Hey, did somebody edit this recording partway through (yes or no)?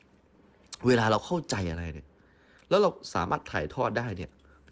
no